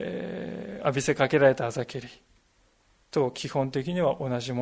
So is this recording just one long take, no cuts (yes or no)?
yes